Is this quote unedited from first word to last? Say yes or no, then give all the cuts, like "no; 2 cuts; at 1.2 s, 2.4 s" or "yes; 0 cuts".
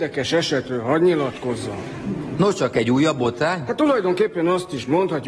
yes; 0 cuts